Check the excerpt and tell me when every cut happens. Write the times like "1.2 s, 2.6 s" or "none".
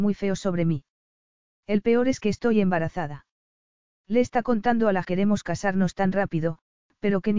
5.0 s